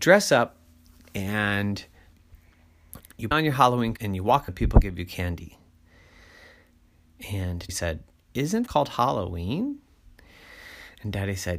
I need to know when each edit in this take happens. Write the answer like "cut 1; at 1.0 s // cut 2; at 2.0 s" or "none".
cut 1; at 3.3 s // cut 2; at 4.0 s // cut 3; at 4.5 s // cut 4; at 7.7 s // cut 5; at 8.7 s